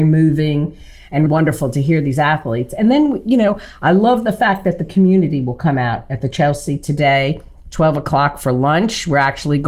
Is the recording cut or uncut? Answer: cut